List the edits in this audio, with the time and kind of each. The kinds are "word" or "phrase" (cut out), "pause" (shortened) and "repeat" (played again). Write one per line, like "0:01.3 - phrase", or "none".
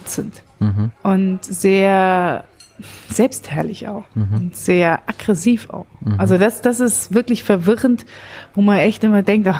0:01.0 - pause